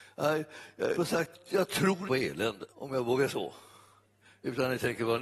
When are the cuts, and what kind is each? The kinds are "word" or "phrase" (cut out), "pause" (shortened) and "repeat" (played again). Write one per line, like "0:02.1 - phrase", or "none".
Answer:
0:00.9 - word
0:01.3 - word
0:02.0 - word
0:02.7 - pause
0:03.3 - word

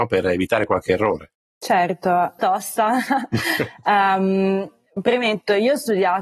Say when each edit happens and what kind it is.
0:02.4 - phrase

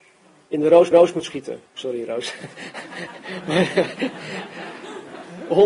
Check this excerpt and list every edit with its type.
0:00.9 - repeat
0:01.7 - pause

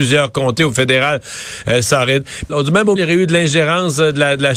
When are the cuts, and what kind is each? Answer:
0:02.5 - phrase
0:03.0 - word

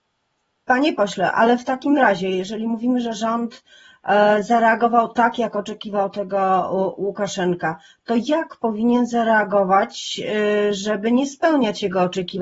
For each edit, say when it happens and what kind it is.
none

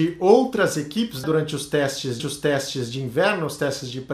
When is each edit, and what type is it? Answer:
0:01.2 - word
0:02.2 - repeat

